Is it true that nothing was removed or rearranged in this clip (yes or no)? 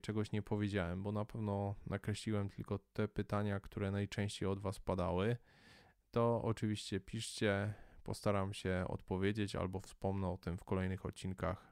yes